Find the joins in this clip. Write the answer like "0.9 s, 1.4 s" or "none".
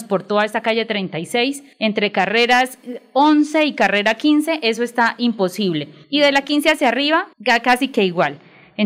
1.7 s, 6.0 s, 7.3 s